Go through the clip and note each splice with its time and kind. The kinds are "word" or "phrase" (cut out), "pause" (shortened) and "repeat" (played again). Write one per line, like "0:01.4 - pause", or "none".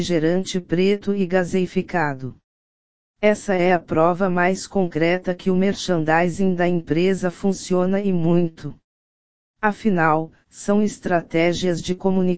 none